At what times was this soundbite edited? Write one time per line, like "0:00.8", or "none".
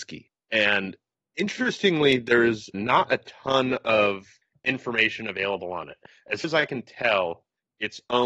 0:02.7
0:06.4